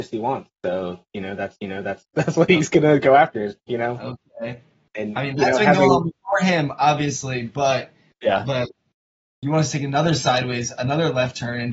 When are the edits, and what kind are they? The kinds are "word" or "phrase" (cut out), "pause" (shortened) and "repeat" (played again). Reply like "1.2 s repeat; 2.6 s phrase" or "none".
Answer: 1.6 s repeat; 3.6 s pause; 9.2 s word